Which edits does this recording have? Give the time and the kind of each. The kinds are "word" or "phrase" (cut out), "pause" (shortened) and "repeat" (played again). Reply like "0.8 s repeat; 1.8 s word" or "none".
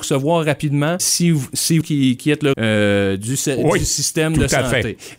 1.0 s word; 1.8 s word; 2.2 s word; 2.5 s word